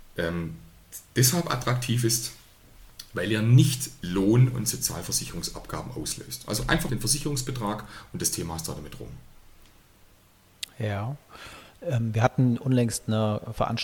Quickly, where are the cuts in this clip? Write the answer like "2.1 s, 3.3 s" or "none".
6.9 s